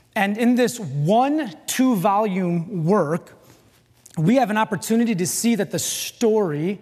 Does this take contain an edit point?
no; 0 cuts

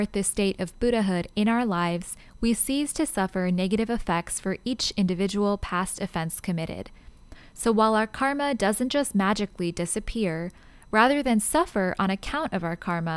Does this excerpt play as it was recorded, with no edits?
yes; 0 cuts

